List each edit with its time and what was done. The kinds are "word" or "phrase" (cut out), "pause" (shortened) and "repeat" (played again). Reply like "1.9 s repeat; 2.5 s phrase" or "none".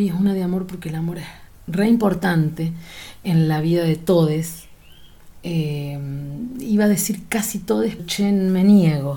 8.0 s word